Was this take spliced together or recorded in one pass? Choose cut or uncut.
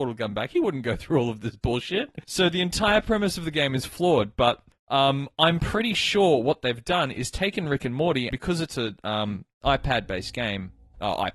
cut